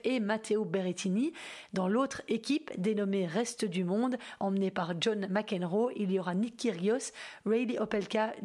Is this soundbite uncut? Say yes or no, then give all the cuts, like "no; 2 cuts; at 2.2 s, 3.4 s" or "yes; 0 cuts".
yes; 0 cuts